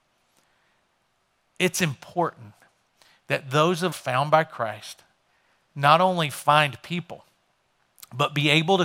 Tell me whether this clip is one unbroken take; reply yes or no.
no